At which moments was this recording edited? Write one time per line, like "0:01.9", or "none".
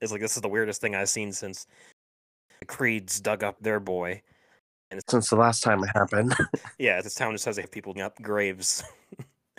0:03.6
0:05.0
0:07.0
0:07.6
0:08.0